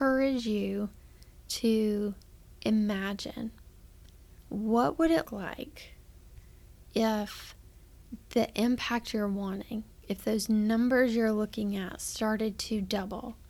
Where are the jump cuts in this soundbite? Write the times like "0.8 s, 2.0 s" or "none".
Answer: 5.2 s

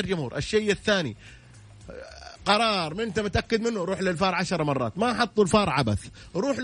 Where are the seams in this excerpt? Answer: none

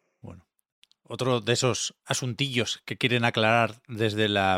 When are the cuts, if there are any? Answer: none

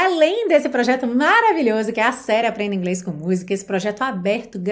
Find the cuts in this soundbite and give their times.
none

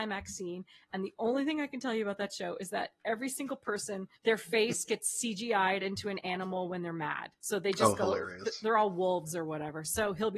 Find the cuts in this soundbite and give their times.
4.2 s, 7.4 s

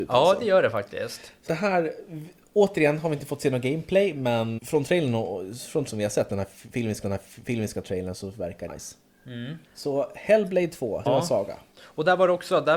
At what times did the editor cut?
1.5 s, 4.6 s, 5.9 s, 7.0 s, 8.7 s, 9.6 s, 11.1 s

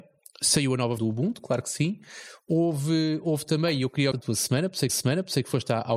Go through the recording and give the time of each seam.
1.0 s, 4.1 s, 4.9 s

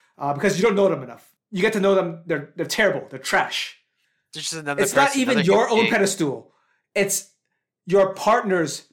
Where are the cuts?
none

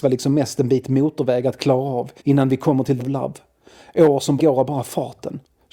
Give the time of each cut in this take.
2.2 s, 3.0 s, 4.4 s

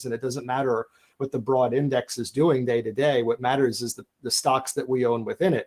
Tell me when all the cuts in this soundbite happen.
none

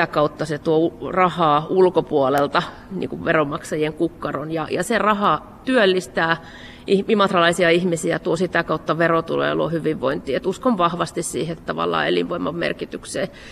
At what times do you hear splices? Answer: none

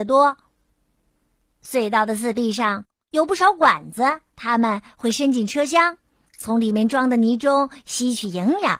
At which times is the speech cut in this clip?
4.3 s

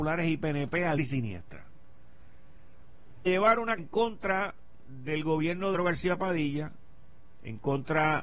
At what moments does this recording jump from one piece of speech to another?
1.0 s, 3.3 s, 3.8 s, 5.7 s

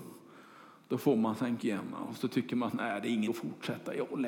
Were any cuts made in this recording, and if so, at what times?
1.6 s, 3.3 s

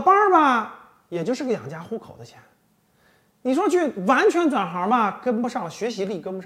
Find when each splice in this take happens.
none

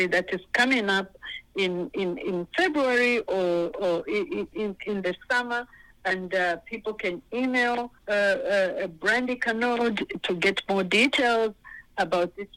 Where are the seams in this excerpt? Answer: 8.0 s

